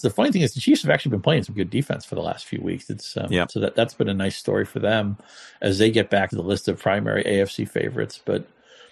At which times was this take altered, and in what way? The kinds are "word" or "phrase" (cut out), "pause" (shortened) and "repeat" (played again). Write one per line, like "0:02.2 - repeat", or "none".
0:01.6 - word
0:06.3 - word